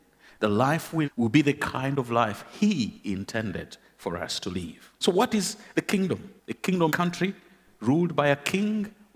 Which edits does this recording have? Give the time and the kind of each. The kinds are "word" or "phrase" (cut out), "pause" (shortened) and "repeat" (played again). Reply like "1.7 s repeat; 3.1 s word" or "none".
1.0 s word; 5.0 s pause; 6.4 s pause; 6.9 s phrase